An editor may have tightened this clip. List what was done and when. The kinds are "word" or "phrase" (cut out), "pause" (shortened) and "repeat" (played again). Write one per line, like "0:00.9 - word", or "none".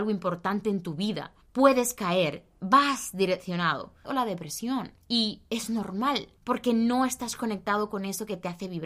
0:01.4 - pause
0:04.0 - phrase
0:05.0 - pause
0:06.4 - pause